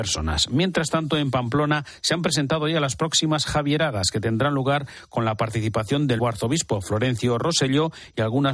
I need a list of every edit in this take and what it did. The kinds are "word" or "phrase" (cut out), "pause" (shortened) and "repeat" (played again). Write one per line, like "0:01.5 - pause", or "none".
0:06.2 - word

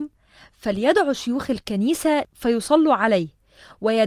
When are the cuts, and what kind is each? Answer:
none

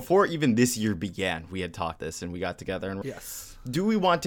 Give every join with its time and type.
0:02.0 - word
0:03.0 - word

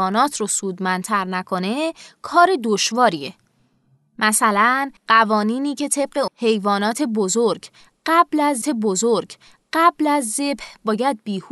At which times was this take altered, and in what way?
0:05.0 - pause
0:06.3 - word
0:08.6 - repeat

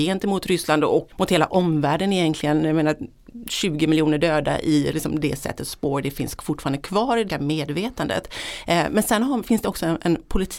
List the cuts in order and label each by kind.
0:04.9 - word
0:07.3 - word

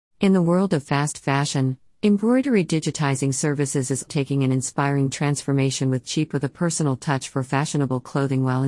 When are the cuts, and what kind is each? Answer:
0:04.1 - word
0:06.3 - word

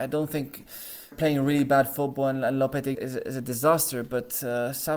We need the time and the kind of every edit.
0:01.1 - word
0:02.9 - word

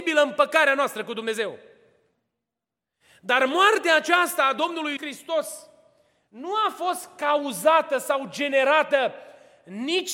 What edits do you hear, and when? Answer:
0:05.0 - word

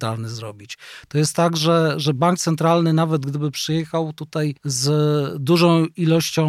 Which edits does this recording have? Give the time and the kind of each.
0:04.6 - pause

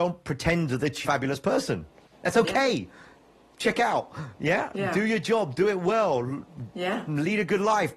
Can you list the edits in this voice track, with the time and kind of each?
0:01.0 - phrase

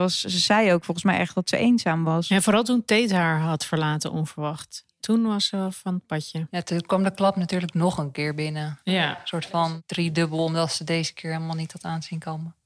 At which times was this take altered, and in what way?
none

